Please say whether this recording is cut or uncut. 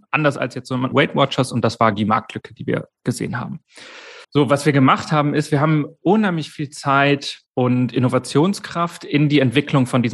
cut